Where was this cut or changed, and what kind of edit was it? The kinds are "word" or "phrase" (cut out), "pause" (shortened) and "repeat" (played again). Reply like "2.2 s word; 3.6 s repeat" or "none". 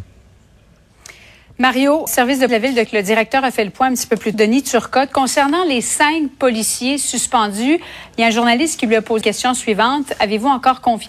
2.1 s word; 2.5 s word; 2.9 s word; 4.3 s word; 9.2 s word

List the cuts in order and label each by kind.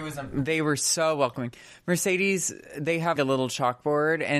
3.2 s word

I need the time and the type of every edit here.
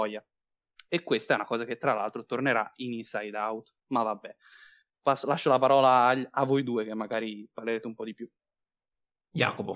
none

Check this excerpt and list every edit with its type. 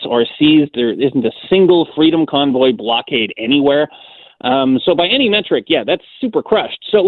none

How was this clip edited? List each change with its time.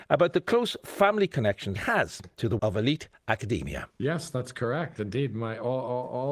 1.8 s word; 2.6 s word; 3.9 s pause

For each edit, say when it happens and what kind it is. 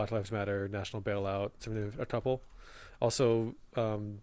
1.6 s word

